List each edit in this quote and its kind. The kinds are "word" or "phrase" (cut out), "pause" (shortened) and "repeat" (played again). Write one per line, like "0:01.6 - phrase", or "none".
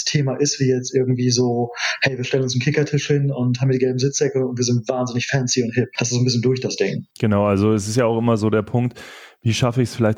0:07.1 - pause